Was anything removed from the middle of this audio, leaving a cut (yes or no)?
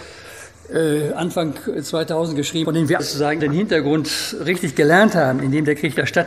yes